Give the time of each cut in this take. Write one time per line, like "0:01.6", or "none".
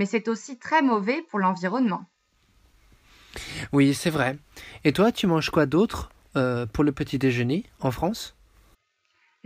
none